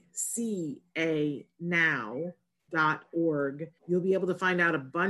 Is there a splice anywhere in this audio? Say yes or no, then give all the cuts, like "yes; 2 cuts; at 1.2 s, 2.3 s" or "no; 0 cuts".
yes; 1 cut; at 3.8 s